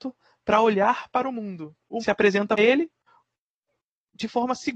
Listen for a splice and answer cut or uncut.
cut